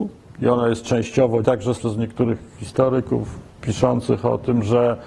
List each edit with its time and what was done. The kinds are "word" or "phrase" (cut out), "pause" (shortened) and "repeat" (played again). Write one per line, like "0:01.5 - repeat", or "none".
0:01.4 - word
0:01.8 - word